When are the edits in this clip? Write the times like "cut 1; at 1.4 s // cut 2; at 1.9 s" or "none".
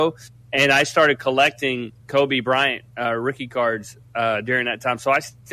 cut 1; at 2.0 s